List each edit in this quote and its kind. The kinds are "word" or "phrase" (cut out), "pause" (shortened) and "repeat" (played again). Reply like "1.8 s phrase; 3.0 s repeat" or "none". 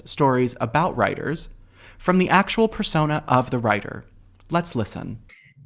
none

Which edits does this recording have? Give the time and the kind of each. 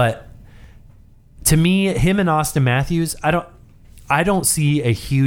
none

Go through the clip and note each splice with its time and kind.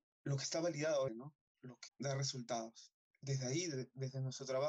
1.1 s word; 1.9 s phrase

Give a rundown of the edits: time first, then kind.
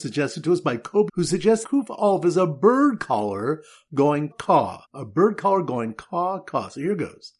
1.1 s word; 1.6 s word; 4.3 s word; 4.8 s pause

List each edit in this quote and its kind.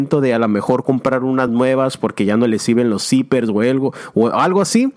none

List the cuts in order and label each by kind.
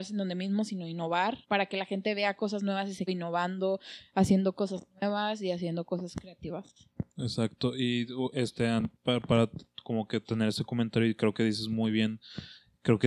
1.4 s pause; 3.1 s phrase

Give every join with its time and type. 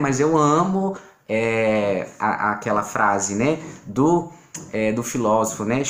none

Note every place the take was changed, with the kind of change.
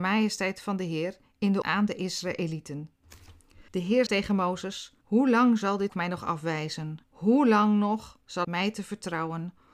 1.6 s word; 3.7 s pause; 4.1 s word; 5.0 s pause; 5.9 s word; 7.0 s pause; 8.4 s phrase

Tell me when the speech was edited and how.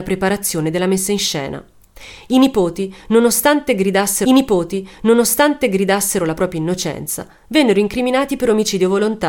4.3 s repeat

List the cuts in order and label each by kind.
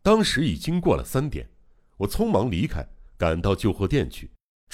3.1 s pause

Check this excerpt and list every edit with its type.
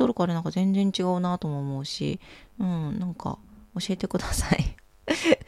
none

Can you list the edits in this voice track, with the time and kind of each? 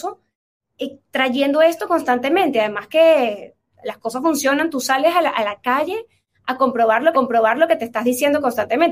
7.1 s repeat

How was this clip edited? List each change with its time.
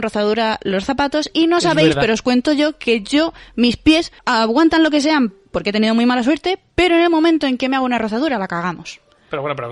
4.2 s pause

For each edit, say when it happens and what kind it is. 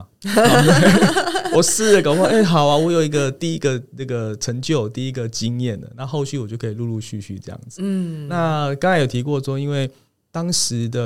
none

